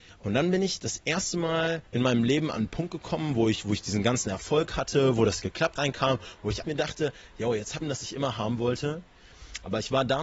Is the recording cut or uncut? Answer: cut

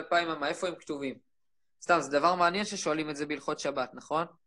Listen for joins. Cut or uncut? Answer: uncut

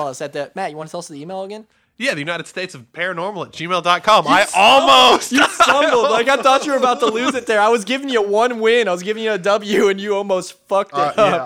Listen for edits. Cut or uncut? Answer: uncut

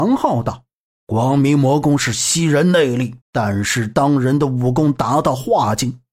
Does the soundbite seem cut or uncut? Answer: cut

